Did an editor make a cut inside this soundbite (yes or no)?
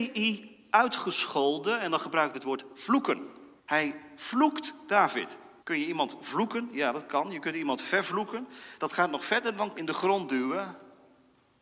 yes